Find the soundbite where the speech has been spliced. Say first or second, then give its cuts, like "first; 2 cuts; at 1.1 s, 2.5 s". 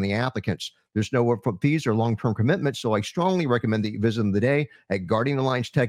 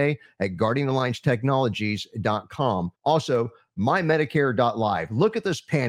second; 1 cut; at 2.9 s